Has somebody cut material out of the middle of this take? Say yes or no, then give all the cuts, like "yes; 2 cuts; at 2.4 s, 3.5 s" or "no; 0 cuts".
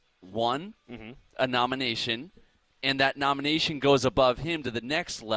no; 0 cuts